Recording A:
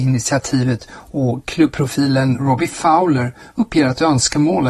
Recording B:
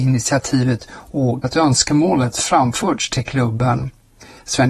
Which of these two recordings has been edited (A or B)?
B